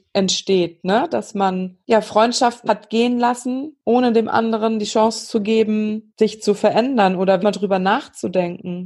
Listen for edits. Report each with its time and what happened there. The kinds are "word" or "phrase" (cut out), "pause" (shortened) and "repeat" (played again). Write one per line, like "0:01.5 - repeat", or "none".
0:02.7 - word
0:07.4 - word

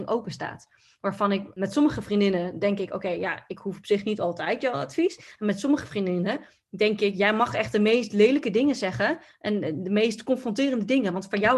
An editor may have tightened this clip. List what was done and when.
none

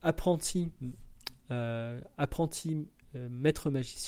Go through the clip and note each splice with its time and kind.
0:03.0 - pause

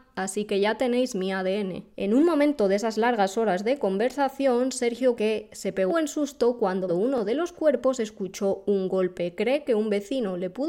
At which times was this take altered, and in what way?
0:01.9 - pause
0:05.2 - word
0:05.9 - word
0:06.9 - word

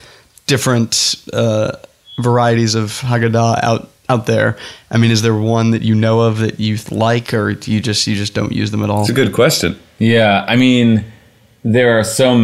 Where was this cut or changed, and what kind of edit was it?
none

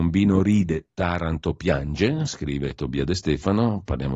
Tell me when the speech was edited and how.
none

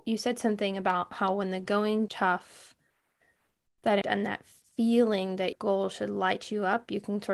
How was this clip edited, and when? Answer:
0:02.1 - word
0:04.0 - phrase
0:05.5 - word

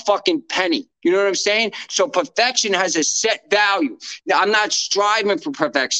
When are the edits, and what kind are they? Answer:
0:00.9 - pause

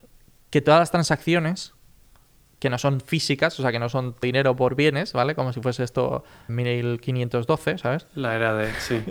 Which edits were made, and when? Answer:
0:04.2 - word
0:06.5 - word

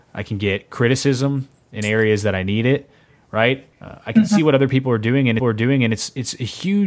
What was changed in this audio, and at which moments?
0:03.7 - pause
0:05.4 - repeat

